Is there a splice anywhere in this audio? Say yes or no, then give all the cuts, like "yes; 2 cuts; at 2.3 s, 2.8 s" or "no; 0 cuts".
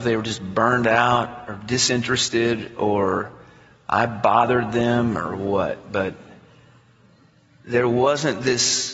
no; 0 cuts